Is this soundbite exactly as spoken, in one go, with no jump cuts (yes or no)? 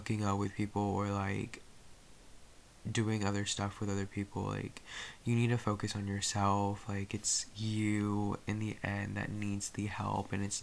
yes